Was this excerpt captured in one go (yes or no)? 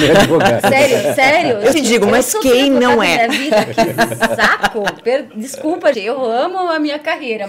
no